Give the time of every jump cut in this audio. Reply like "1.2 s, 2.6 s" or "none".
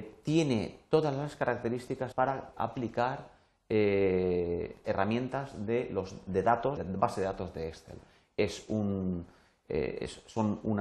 2.1 s, 2.5 s, 4.8 s, 6.8 s